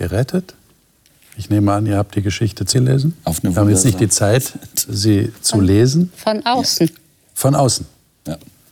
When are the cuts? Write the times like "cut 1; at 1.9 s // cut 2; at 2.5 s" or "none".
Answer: cut 1; at 2.7 s